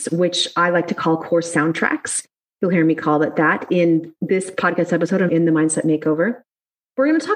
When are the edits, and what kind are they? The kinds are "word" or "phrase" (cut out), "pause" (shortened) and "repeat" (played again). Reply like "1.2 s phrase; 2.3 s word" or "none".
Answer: 5.3 s word

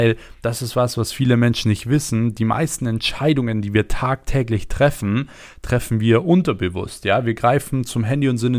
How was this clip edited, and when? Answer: none

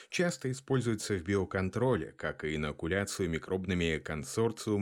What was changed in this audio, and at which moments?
none

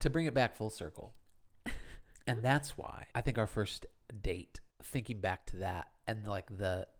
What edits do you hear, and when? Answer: 3.1 s pause; 4.7 s pause

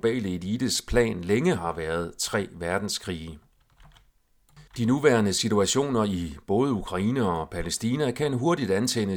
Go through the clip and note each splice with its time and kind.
4.7 s pause

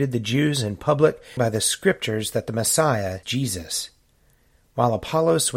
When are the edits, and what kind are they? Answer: 1.4 s word; 3.2 s word

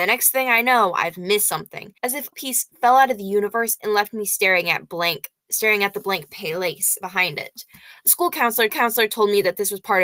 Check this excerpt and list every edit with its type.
2.0 s pause; 2.3 s word; 5.4 s pause; 8.7 s repeat

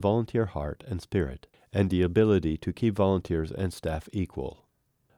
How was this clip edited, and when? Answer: none

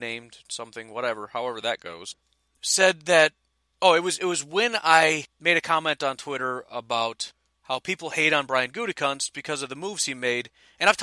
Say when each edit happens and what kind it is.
none

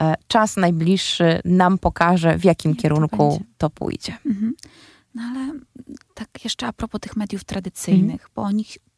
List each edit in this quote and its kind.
none

